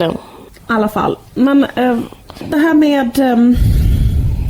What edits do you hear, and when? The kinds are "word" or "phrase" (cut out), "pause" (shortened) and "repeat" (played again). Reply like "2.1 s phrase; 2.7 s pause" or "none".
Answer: none